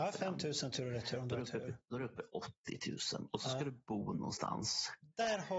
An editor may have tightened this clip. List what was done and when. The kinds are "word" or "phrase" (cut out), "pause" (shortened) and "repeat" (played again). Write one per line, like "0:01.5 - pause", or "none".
none